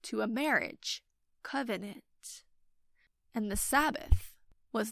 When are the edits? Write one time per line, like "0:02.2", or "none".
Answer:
none